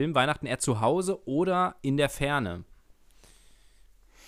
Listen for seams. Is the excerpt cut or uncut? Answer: uncut